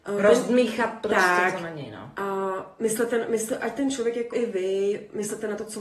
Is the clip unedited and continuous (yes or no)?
no